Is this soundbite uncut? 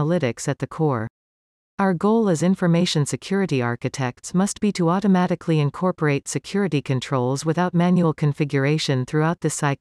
yes; 0 cuts

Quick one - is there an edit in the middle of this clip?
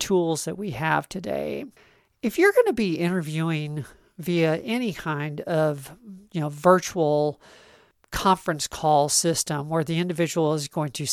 no; 0 cuts

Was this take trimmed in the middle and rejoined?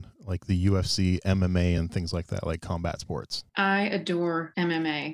no; 0 cuts

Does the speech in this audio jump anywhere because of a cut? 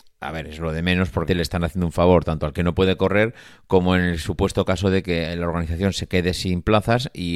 yes; 1 cut; at 1.3 s

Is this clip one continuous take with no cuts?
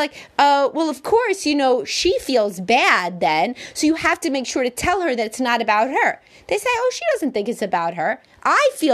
yes; 0 cuts

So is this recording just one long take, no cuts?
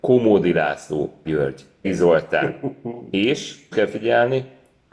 no; 3 cuts; at 1.3 s, 1.8 s, 3.7 s

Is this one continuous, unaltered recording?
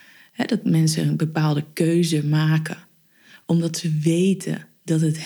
yes; 0 cuts

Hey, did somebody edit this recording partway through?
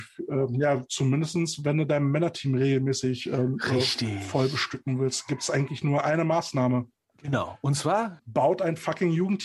no; 0 cuts

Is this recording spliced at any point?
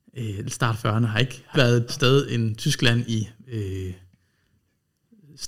yes; 3 cuts; at 1.5 s, 1.9 s, 3.4 s

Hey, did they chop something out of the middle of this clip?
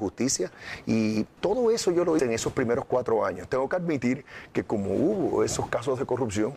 yes; 2 cuts; at 1.4 s, 2.2 s

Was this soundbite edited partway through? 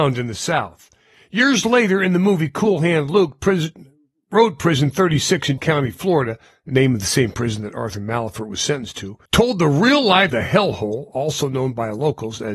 yes; 3 cuts; at 5.6 s, 9.3 s, 10.3 s

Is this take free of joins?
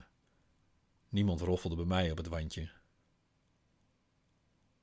yes; 0 cuts

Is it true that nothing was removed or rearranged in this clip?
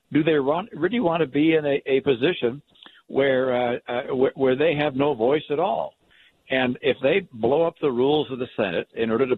yes; 0 cuts

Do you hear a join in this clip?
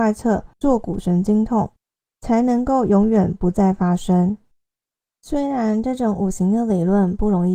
no; 0 cuts

